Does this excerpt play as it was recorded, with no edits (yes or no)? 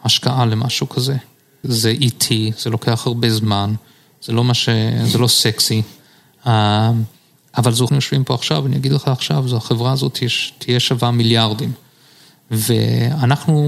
no